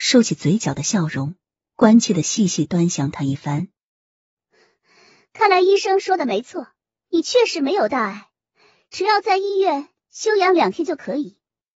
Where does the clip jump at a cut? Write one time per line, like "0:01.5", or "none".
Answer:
none

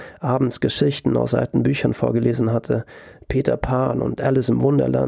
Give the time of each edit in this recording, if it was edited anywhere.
none

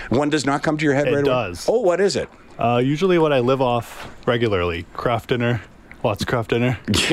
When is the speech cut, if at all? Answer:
none

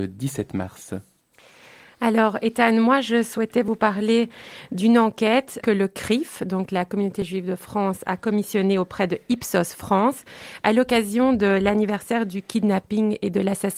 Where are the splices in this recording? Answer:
0:05.6

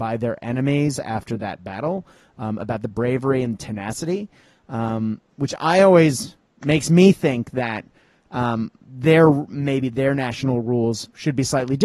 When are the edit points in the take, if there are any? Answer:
none

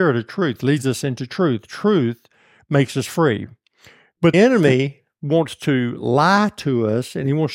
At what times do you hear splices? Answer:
0:04.3

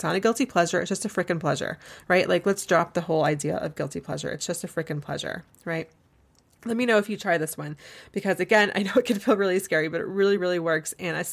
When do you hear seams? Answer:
none

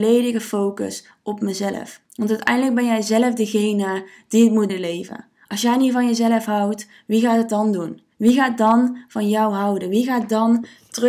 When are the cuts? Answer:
0:02.1
0:04.7
0:08.1

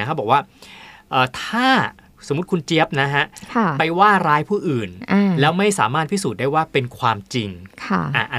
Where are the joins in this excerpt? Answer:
0:02.1

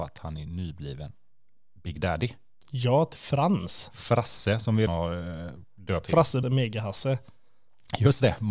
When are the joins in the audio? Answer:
0:03.1
0:04.9
0:06.0
0:06.4

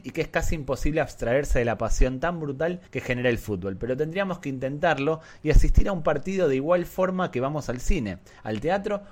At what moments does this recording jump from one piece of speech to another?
0:02.9

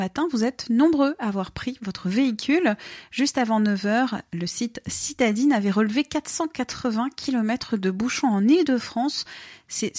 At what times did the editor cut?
none

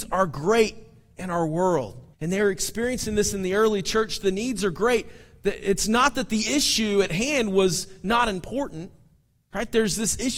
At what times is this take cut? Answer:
0:02.1

